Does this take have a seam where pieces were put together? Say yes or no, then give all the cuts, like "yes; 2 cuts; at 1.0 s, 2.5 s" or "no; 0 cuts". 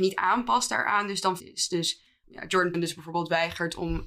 yes; 3 cuts; at 1.4 s, 2.2 s, 2.7 s